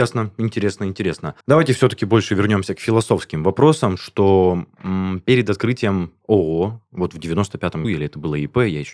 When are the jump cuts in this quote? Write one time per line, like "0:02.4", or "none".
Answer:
0:01.4
0:07.8